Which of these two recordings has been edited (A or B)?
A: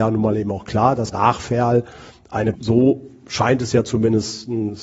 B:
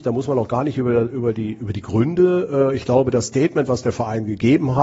A